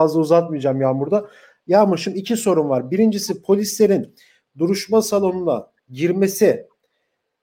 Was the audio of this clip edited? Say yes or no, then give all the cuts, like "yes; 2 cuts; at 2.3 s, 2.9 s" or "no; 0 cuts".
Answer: no; 0 cuts